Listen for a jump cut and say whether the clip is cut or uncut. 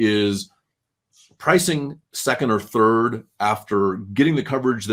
cut